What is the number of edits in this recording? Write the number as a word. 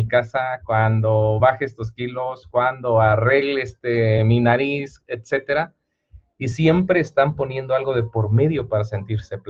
zero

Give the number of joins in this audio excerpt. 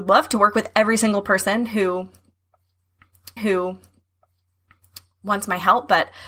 one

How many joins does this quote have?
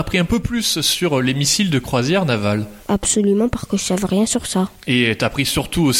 one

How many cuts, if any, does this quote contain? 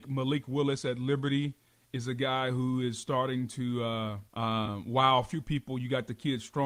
one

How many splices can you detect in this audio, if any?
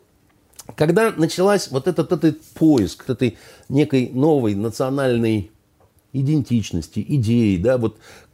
two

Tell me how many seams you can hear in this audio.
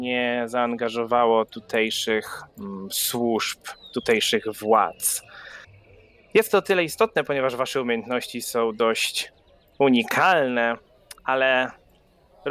one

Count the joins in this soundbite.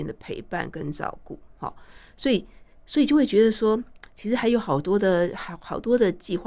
zero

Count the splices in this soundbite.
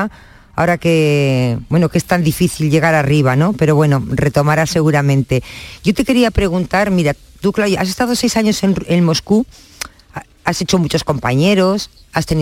zero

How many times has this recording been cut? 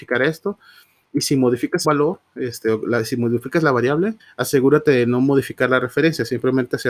two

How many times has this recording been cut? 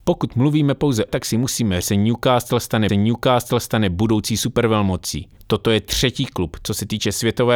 four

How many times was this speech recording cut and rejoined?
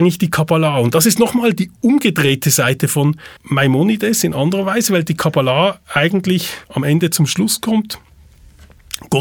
two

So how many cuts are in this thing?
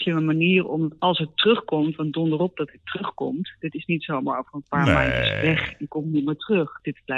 zero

